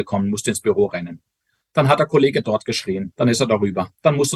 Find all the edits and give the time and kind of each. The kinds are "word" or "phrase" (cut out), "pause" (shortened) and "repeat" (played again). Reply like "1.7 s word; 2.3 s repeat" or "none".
none